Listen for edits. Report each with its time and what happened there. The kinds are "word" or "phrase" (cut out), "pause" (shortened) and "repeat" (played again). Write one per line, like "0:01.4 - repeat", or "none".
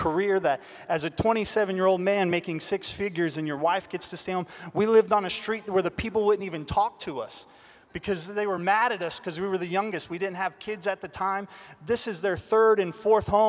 none